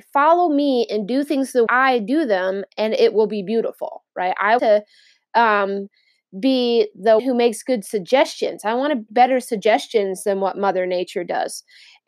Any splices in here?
yes; 4 cuts; at 1.7 s, 4.6 s, 7.2 s, 9.1 s

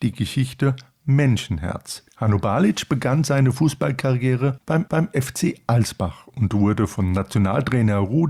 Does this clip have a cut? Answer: yes; 2 cuts; at 2.1 s, 4.9 s

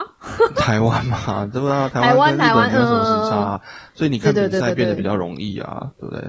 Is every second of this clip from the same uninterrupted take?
yes; 0 cuts

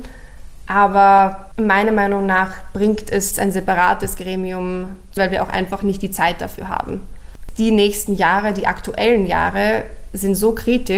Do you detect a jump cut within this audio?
yes; 2 cuts; at 3.3 s, 5.2 s

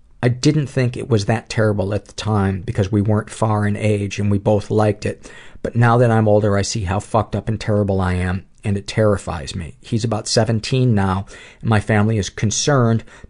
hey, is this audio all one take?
yes; 0 cuts

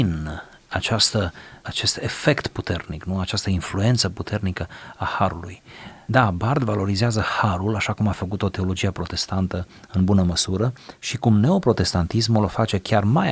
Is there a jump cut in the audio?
no; 0 cuts

